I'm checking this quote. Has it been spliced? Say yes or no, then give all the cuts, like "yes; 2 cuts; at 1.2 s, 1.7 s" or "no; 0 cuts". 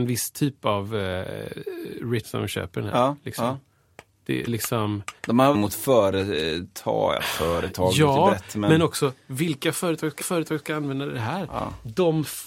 yes; 5 cuts; at 2.2 s, 4.5 s, 5.2 s, 5.5 s, 10.2 s